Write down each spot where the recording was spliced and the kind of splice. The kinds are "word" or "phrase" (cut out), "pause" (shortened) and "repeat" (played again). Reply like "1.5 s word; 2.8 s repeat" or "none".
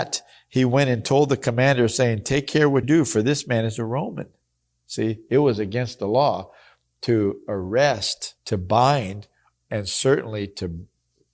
2.8 s word; 8.4 s pause

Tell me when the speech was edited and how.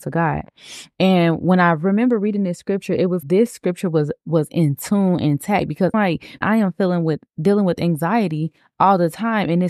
3.2 s word; 5.9 s word; 6.4 s word

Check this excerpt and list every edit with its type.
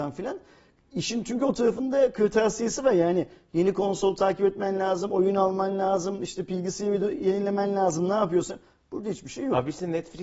none

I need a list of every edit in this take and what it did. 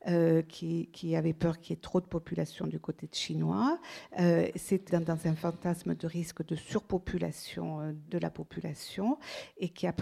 4.9 s word; 8.1 s word

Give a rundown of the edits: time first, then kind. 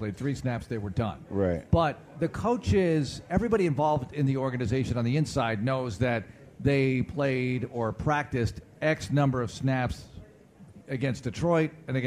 none

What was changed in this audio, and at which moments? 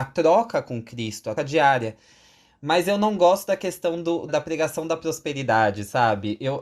1.4 s word; 4.3 s word

